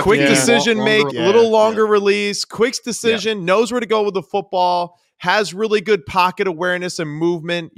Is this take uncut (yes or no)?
no